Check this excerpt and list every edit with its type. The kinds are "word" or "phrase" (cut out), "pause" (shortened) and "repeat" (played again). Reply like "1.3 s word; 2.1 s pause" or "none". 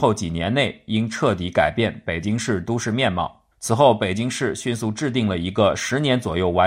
3.5 s pause